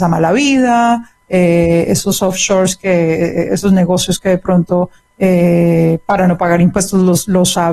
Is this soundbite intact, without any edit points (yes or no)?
yes